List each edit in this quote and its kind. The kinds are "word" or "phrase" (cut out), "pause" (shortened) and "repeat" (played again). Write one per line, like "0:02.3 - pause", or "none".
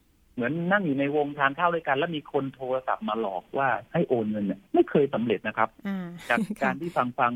0:04.7 - pause